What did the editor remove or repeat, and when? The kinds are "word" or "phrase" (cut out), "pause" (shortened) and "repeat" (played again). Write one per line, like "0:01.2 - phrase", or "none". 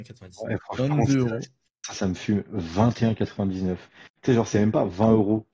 none